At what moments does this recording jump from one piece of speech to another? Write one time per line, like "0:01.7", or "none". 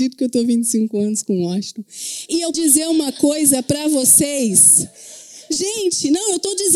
0:02.5